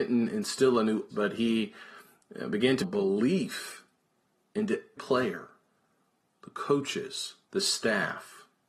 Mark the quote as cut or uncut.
cut